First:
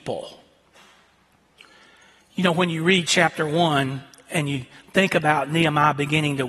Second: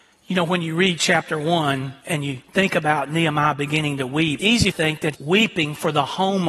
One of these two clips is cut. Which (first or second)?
second